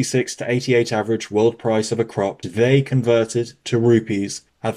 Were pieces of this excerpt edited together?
yes; 1 cut; at 2.4 s

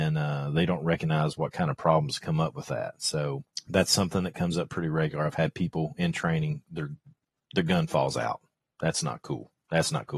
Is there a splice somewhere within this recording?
no; 0 cuts

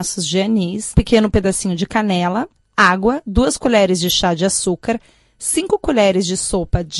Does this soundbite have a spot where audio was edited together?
no; 0 cuts

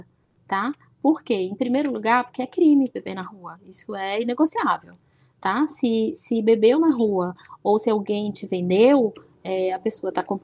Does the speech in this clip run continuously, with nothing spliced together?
yes; 0 cuts

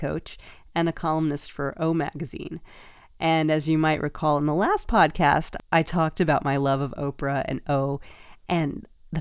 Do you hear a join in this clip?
no; 0 cuts

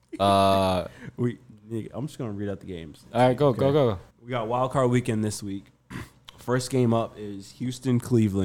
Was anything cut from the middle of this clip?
yes; 1 cut; at 4.1 s

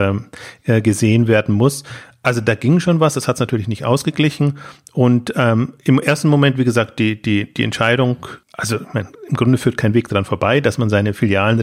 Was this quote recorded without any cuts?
yes; 0 cuts

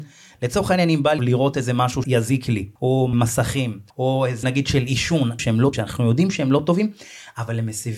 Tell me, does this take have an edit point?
yes; 8 cuts; at 1.2 s, 2.0 s, 2.8 s, 3.1 s, 3.9 s, 4.4 s, 5.4 s, 5.7 s

